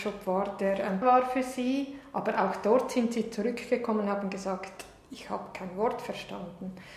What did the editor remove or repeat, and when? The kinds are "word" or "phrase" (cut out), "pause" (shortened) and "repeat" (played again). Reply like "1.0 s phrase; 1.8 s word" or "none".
1.0 s phrase

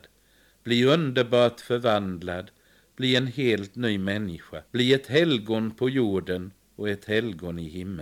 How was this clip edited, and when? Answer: 4.7 s pause

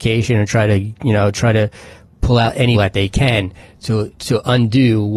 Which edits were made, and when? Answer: 2.7 s word

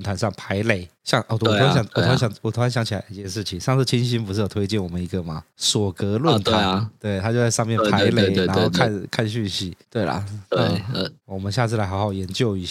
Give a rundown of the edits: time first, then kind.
none

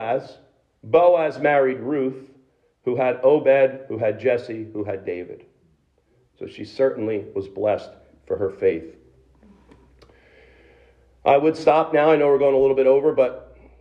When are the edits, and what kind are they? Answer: none

